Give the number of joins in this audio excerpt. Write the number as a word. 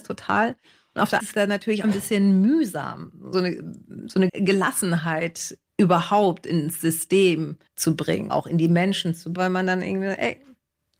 eight